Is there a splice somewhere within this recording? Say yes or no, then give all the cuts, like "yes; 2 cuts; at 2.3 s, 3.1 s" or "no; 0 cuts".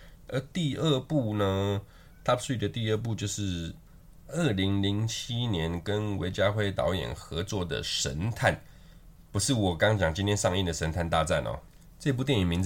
no; 0 cuts